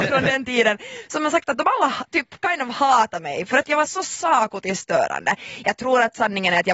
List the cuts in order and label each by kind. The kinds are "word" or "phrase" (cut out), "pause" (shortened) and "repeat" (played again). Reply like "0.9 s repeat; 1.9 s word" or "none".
none